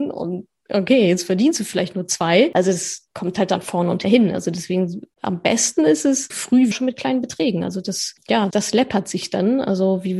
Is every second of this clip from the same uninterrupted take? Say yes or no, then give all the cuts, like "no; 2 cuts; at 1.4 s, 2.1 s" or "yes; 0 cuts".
no; 6 cuts; at 3.1 s, 4.0 s, 5.1 s, 6.3 s, 6.7 s, 8.5 s